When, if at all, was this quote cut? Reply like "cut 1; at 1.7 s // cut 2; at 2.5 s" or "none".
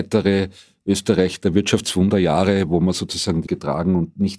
cut 1; at 3.5 s